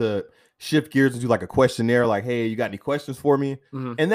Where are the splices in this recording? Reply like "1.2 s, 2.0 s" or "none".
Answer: none